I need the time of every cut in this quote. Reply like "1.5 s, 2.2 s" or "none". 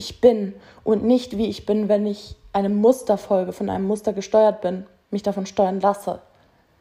none